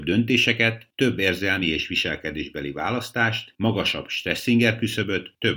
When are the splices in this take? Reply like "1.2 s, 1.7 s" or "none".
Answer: none

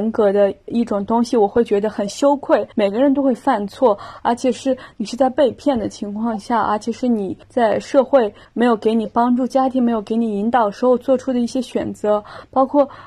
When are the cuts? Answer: 2.7 s, 7.4 s, 8.4 s

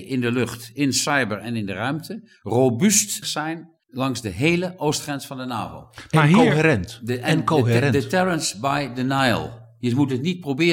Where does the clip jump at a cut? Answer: 3.2 s, 3.8 s

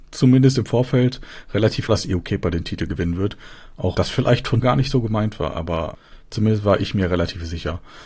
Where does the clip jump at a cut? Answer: 1.9 s, 3.9 s, 4.6 s

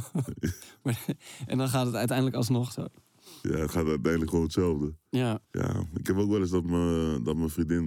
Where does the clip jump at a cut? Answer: 5.4 s

